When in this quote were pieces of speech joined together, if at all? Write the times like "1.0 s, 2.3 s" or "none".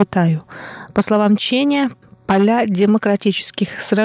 none